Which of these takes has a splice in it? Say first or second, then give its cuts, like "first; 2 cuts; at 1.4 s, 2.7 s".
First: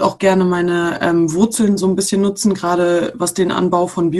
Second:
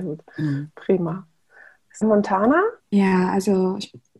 second; 2 cuts; at 2.0 s, 2.8 s